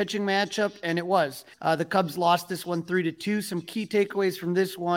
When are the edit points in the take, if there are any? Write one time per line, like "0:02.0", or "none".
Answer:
0:01.5